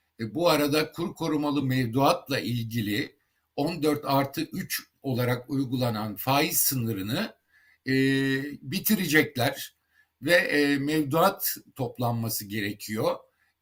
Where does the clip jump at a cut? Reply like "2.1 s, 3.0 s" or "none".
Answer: none